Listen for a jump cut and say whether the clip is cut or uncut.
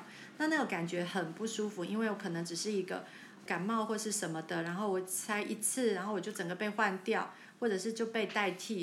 cut